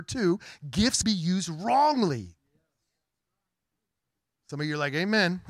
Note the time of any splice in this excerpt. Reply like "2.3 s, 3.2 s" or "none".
1.0 s